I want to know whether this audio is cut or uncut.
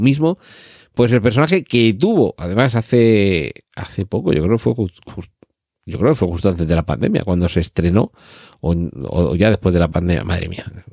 uncut